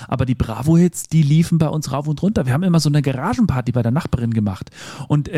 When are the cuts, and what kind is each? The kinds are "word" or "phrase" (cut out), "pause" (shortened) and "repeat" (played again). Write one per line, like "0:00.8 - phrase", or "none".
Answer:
none